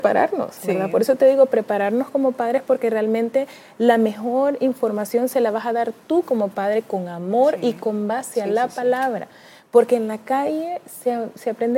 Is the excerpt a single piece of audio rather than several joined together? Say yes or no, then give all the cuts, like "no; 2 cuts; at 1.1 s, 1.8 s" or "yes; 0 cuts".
yes; 0 cuts